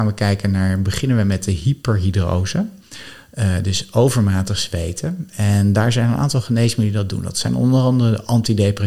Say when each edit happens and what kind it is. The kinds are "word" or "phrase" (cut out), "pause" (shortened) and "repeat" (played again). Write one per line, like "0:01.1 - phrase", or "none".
none